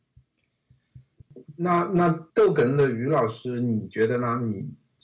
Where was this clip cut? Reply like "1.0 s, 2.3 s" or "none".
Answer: 1.5 s, 2.3 s